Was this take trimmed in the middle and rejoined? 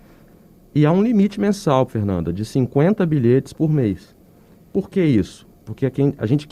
no; 0 cuts

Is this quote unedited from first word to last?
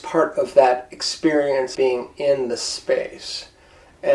no; 1 cut; at 1.7 s

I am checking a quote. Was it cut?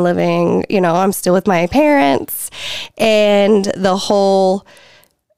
no; 0 cuts

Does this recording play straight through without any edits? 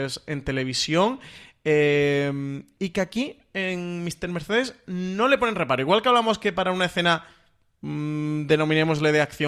yes; 0 cuts

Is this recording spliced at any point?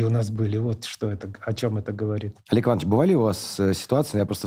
no; 0 cuts

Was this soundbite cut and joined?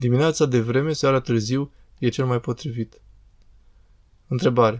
yes; 2 cuts; at 0.9 s, 2.1 s

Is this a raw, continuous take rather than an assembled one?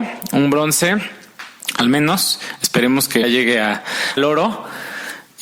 no; 2 cuts; at 3.2 s, 4.2 s

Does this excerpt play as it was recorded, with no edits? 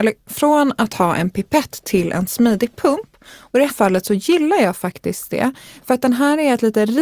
no; 1 cut; at 3.7 s

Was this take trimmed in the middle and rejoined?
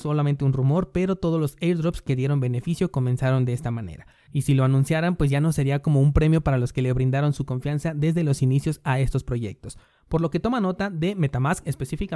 no; 0 cuts

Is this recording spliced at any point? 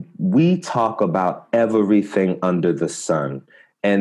no; 0 cuts

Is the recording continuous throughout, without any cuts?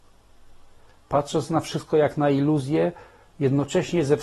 yes; 0 cuts

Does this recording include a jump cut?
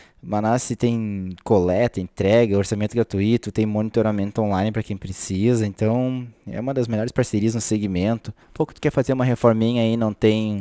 yes; 1 cut; at 8.4 s

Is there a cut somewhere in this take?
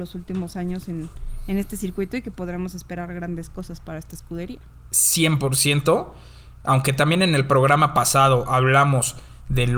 no; 0 cuts

